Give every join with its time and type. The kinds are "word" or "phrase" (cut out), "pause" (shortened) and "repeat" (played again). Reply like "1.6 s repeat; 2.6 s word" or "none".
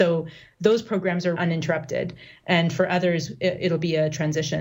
1.4 s word